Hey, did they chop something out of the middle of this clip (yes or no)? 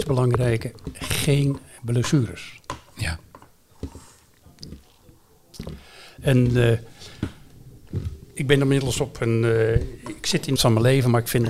yes